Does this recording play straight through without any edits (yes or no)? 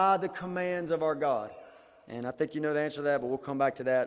yes